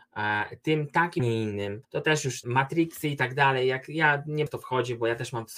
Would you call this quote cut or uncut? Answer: cut